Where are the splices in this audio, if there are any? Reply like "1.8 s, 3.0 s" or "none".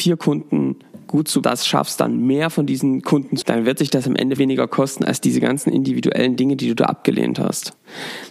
1.4 s, 3.4 s, 4.4 s